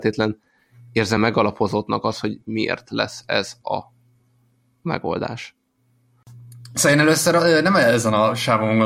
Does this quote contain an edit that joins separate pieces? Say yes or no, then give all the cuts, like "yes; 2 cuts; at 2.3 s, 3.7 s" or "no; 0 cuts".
no; 0 cuts